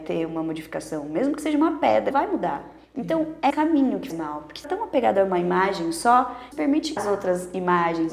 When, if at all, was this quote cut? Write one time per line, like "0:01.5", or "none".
0:02.1
0:02.8
0:03.5
0:04.1
0:04.6
0:06.5
0:07.0